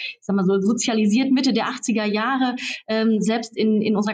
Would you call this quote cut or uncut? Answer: uncut